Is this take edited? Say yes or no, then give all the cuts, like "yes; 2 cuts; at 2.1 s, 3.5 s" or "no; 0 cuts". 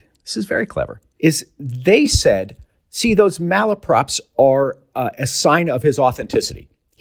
no; 0 cuts